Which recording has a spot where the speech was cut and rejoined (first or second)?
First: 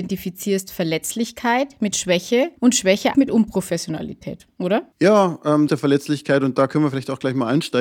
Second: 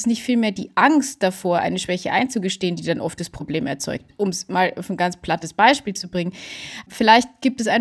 first